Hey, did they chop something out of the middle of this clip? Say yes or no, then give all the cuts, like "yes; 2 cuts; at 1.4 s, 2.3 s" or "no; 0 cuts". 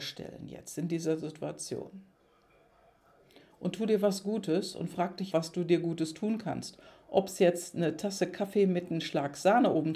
yes; 1 cut; at 5.3 s